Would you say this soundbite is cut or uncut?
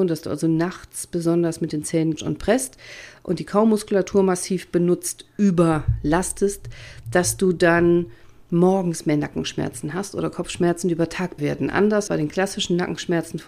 cut